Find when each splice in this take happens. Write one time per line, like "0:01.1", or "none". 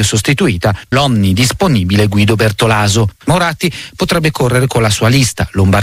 0:00.9
0:03.2